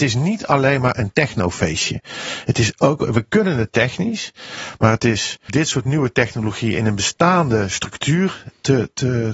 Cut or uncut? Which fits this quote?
cut